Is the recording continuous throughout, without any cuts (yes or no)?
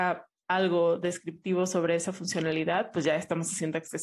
yes